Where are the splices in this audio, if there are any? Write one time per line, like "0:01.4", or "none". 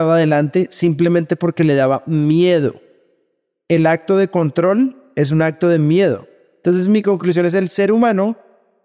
none